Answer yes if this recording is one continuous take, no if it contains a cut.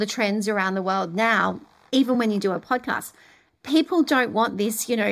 yes